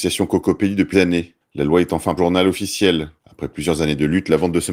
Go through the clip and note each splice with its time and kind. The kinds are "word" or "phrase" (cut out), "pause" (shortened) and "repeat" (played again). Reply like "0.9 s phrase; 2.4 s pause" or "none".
0.9 s word; 2.2 s phrase; 3.2 s pause